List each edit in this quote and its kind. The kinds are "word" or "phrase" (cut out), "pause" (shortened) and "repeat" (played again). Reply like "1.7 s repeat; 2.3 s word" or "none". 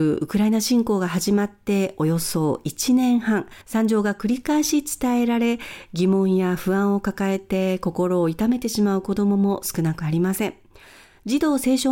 3.6 s pause